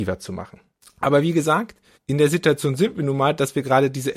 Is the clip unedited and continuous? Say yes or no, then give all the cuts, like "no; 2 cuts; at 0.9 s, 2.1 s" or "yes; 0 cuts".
yes; 0 cuts